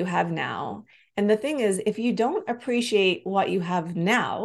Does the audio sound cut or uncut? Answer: uncut